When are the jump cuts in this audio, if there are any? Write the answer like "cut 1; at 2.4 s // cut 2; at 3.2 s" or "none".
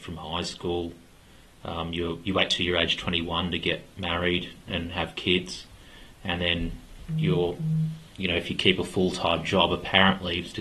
none